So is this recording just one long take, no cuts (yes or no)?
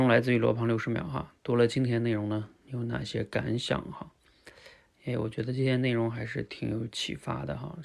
yes